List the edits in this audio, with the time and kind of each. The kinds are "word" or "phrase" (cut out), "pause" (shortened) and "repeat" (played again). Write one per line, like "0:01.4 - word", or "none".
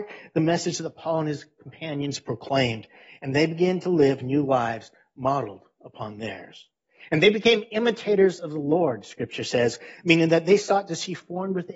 none

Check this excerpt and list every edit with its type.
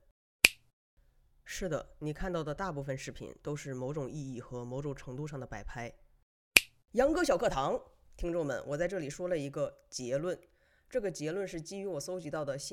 none

